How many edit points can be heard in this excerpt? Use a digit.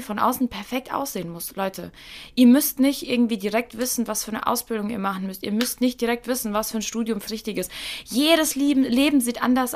1